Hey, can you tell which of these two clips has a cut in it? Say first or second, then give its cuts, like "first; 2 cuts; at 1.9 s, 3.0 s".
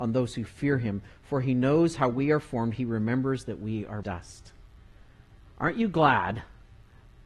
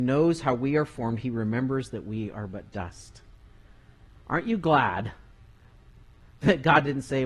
first; 1 cut; at 4.0 s